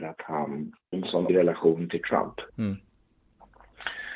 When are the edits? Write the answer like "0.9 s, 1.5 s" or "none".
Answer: 0.9 s, 1.3 s, 2.5 s